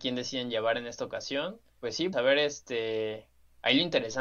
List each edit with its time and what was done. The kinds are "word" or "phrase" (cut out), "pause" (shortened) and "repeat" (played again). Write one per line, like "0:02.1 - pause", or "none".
0:02.1 - word